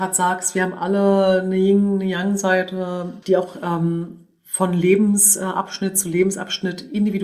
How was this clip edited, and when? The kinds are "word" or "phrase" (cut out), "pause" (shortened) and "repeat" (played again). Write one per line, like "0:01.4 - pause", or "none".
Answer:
0:03.2 - pause